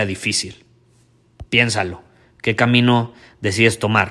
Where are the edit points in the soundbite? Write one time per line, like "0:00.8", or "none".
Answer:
0:01.5

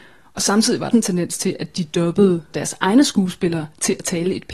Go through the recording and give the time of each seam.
0:00.9
0:02.5

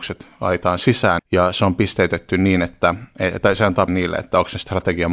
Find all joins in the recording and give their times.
0:01.2
0:03.9

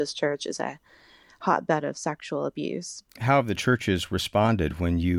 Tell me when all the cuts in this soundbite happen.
none

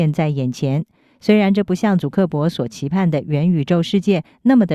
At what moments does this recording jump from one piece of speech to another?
none

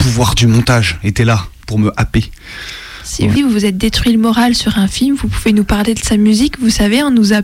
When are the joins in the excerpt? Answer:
0:03.3

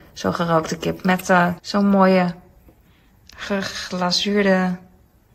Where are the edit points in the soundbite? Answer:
0:01.6

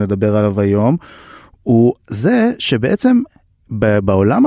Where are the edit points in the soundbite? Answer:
none

